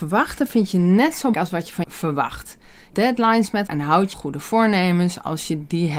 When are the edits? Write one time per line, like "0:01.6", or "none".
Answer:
0:01.3
0:01.8
0:02.9
0:03.7
0:04.1